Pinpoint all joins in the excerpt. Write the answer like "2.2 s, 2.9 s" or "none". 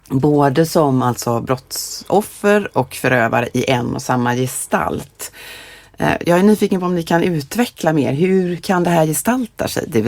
2.7 s, 6.2 s, 8.6 s